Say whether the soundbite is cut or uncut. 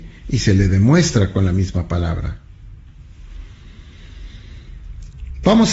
uncut